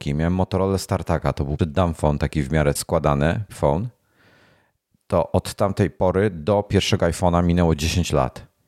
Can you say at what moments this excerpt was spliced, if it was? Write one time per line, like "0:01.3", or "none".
0:01.6
0:02.8
0:03.5